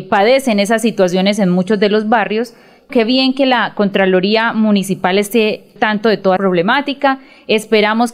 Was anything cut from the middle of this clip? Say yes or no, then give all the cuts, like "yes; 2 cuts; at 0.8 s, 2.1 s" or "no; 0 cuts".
yes; 3 cuts; at 2.9 s, 5.8 s, 6.4 s